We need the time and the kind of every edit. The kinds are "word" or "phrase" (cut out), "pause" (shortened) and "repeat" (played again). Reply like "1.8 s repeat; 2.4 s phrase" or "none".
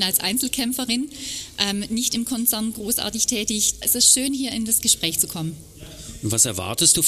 3.8 s word